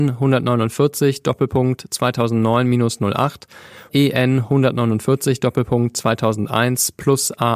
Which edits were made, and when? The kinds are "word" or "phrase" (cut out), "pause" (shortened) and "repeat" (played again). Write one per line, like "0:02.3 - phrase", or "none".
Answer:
0:03.9 - word

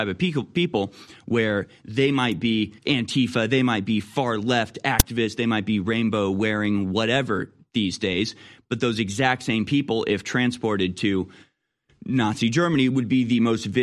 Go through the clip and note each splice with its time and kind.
0:02.8 - pause

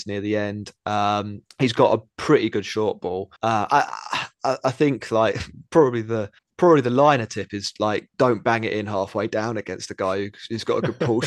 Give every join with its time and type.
0:01.5 - pause
0:03.4 - pause
0:06.4 - pause
0:08.1 - pause

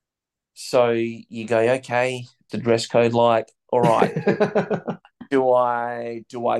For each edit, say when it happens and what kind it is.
0:02.5 - word

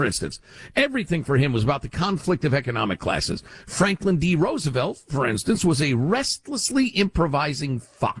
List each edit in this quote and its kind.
none

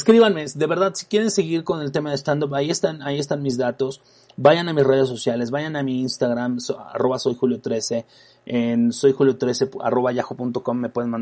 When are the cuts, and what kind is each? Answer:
none

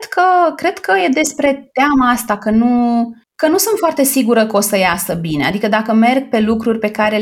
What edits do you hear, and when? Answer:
none

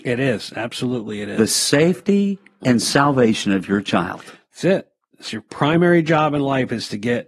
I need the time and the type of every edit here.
none

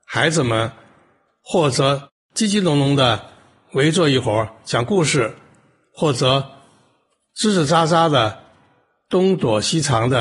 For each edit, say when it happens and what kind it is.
none

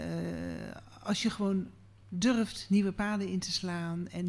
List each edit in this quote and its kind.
none

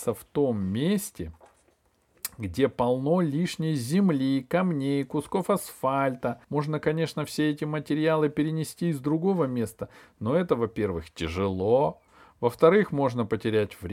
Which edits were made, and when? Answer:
0:06.4 - pause

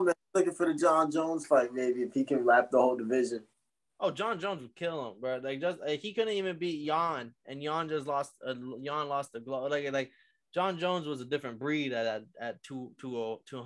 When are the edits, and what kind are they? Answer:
0:07.4 - pause

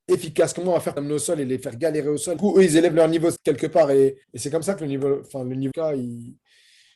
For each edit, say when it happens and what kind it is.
0:01.0 - phrase
0:02.4 - phrase
0:03.4 - word
0:04.2 - pause
0:05.7 - phrase

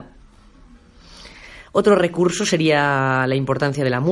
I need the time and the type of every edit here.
none

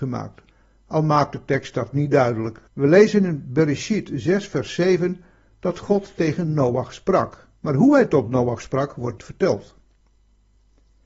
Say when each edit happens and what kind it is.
0:02.7 - pause
0:07.6 - pause
0:09.2 - word

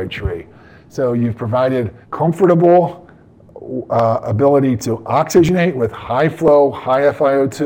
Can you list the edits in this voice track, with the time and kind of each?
0:02.0 - pause

